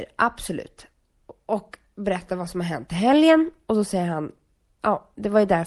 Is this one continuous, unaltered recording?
yes; 0 cuts

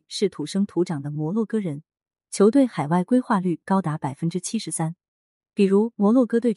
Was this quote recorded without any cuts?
yes; 0 cuts

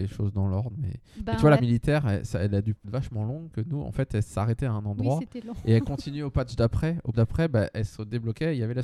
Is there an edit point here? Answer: yes; 4 cuts; at 1.6 s, 2.8 s, 3.5 s, 7.1 s

